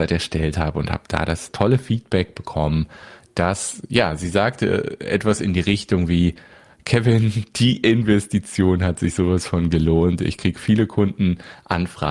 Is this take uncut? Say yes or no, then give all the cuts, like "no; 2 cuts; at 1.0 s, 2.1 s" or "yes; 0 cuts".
yes; 0 cuts